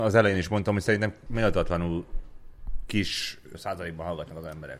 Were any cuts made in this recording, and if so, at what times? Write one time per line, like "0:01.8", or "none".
0:01.3
0:03.5